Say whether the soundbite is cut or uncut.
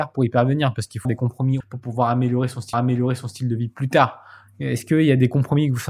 cut